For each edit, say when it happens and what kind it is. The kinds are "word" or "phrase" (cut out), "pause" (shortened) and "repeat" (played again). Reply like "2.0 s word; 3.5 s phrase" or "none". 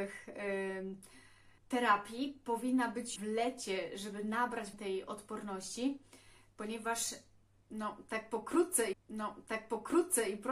1.6 s pause; 3.2 s phrase; 4.7 s word; 8.9 s repeat

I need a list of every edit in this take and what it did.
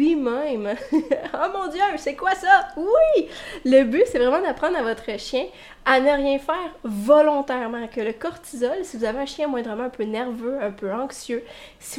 none

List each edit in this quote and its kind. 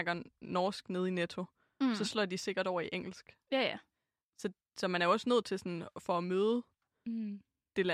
none

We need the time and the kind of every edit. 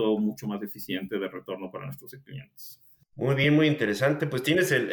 none

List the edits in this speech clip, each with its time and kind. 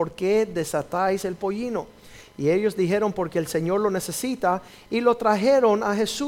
none

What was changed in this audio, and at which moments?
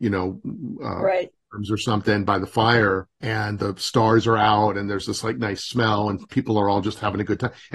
3.1 s pause

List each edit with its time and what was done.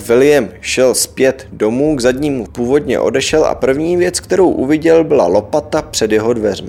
2.5 s phrase

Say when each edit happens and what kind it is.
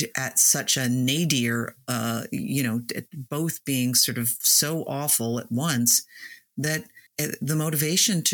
7.1 s pause

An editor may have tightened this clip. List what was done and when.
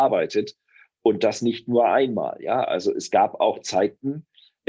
none

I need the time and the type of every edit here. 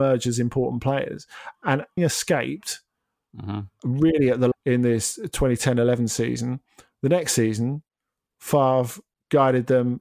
2.0 s word; 4.5 s word

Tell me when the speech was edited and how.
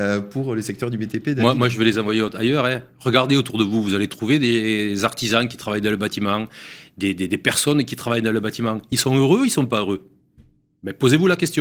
none

